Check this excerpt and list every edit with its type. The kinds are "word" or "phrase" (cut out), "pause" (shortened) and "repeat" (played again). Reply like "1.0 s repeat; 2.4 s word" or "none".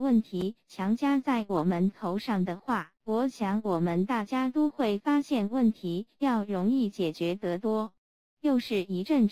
2.9 s pause